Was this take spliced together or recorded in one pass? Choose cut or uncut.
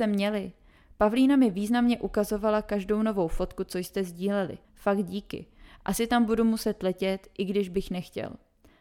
cut